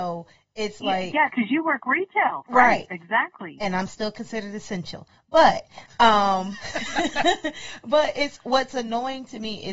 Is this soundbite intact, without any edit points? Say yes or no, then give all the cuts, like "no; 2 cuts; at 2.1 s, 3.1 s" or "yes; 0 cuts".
yes; 0 cuts